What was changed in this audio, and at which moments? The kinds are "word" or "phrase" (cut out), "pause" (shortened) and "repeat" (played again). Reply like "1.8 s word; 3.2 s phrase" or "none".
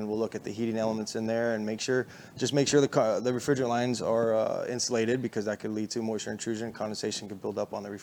none